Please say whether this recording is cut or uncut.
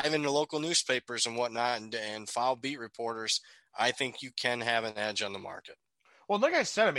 uncut